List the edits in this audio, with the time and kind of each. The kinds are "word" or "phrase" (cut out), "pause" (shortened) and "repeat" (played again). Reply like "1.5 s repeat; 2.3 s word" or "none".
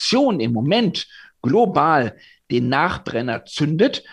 none